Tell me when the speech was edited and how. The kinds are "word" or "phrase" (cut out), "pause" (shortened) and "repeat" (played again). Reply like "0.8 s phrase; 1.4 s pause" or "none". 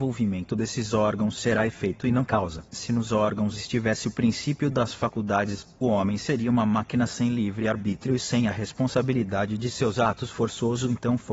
2.7 s pause